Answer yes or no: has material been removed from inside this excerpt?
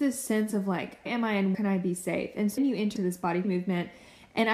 yes